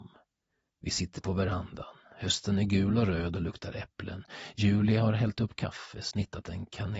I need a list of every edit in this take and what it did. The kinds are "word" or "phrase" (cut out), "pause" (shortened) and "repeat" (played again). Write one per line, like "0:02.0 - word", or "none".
none